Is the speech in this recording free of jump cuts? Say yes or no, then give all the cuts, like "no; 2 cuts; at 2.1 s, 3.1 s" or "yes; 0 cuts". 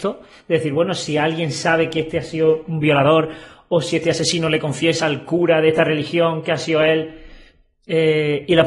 yes; 0 cuts